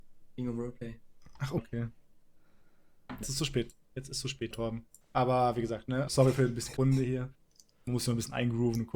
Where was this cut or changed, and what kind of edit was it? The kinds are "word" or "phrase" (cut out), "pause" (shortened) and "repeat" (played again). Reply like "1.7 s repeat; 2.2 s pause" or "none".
1.6 s word; 3.2 s word; 4.5 s word; 5.0 s pause; 6.1 s word; 6.8 s word